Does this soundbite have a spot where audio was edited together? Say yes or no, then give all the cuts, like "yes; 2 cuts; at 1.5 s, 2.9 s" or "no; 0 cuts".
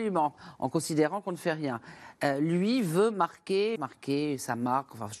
yes; 1 cut; at 3.8 s